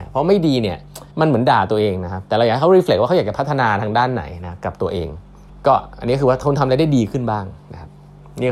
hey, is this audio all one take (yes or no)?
no